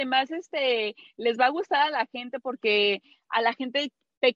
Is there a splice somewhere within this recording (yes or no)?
no